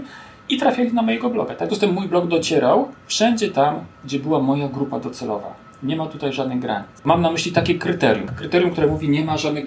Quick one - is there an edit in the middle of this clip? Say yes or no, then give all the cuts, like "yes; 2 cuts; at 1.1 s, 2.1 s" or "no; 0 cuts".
yes; 3 cuts; at 1.7 s, 3.0 s, 3.9 s